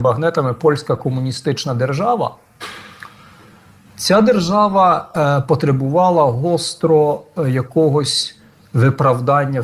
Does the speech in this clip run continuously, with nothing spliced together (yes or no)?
yes